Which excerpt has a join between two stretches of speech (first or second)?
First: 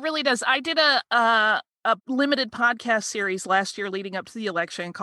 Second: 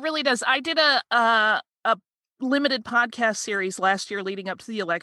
first